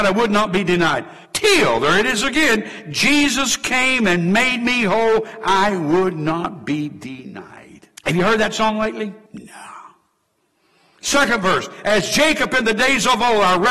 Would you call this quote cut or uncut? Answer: cut